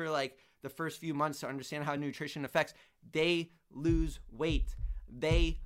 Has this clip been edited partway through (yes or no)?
no